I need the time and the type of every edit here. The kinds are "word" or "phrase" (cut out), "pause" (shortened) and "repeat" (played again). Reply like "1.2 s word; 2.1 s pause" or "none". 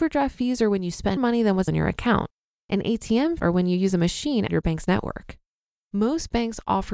1.2 s word; 1.7 s word; 3.4 s word; 4.5 s word